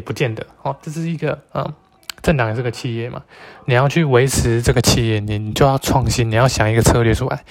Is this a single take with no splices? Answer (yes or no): yes